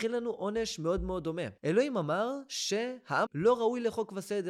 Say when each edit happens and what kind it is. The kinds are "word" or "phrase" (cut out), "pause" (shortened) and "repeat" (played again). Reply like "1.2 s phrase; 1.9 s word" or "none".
1.6 s pause; 3.3 s word